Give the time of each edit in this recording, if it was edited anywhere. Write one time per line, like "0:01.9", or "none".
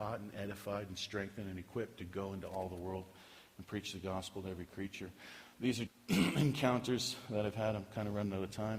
0:05.9